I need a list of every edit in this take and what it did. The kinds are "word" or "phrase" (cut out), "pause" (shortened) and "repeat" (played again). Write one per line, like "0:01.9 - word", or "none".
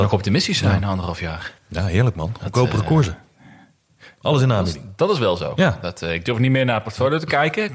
0:01.6 - pause